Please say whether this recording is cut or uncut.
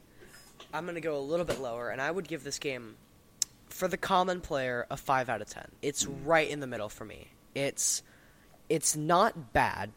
cut